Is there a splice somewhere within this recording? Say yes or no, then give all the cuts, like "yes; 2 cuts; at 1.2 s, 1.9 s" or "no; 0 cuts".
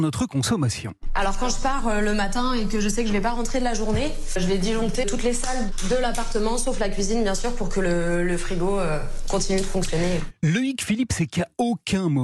no; 0 cuts